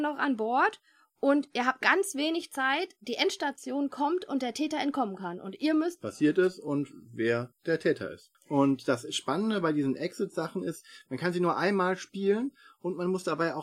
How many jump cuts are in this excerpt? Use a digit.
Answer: 3